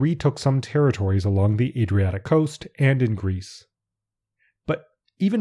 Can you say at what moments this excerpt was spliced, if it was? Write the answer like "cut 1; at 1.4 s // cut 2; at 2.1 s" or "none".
none